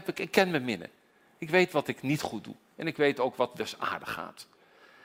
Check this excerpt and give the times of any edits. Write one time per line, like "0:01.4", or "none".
none